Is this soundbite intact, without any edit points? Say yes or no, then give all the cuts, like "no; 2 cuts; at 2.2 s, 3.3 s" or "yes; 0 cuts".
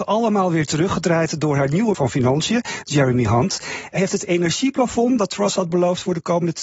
no; 2 cuts; at 1.9 s, 4.0 s